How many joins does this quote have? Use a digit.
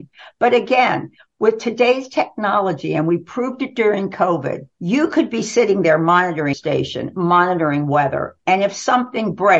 2